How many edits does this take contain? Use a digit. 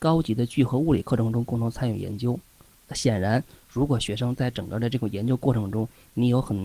0